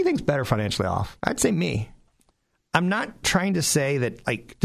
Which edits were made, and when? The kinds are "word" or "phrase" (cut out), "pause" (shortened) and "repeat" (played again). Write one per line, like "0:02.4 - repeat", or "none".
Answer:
none